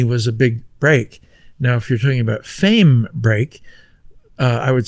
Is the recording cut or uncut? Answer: uncut